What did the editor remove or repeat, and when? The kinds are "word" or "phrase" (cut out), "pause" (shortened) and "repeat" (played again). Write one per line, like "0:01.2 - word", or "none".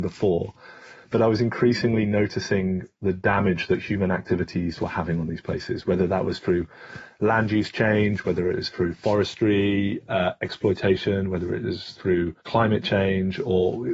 0:12.4 - pause